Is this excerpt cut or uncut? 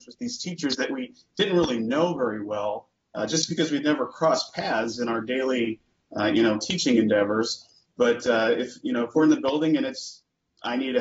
uncut